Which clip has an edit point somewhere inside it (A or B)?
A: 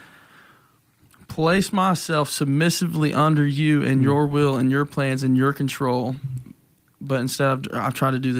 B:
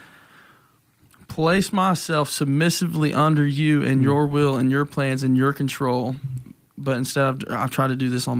B